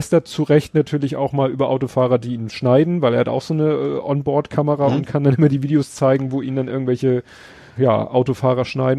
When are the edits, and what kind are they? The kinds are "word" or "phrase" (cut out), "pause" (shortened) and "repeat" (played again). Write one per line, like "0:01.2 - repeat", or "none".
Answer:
0:07.8 - word